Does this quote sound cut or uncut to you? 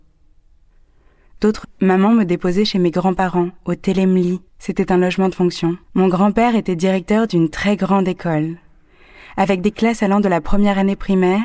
cut